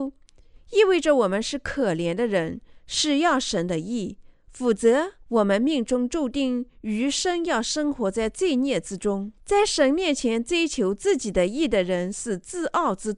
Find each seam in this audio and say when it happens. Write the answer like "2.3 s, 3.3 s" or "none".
5.2 s, 9.4 s